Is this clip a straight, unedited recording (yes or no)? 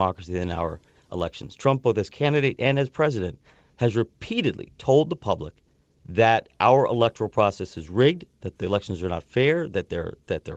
no